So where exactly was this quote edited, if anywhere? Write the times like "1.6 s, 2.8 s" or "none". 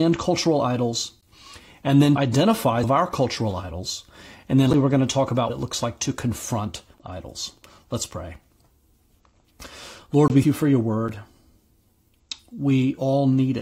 2.2 s, 2.8 s, 4.7 s, 5.5 s, 6.9 s, 10.4 s